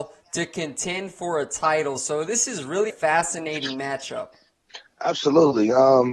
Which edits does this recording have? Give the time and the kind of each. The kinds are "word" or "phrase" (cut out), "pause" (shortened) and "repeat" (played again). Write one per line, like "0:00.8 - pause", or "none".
0:02.9 - word